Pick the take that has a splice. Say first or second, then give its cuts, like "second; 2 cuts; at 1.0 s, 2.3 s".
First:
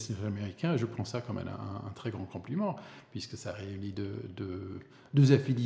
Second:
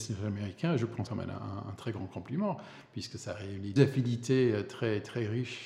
second; 2 cuts; at 1.1 s, 3.8 s